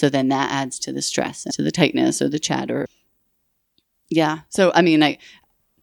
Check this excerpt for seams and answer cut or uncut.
cut